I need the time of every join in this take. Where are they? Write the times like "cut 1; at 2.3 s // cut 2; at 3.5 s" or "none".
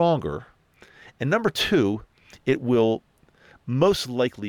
none